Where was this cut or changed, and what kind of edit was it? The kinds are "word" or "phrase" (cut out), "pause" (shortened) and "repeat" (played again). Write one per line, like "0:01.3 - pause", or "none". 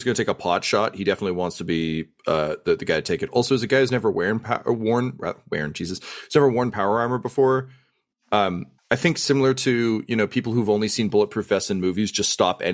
0:08.8 - pause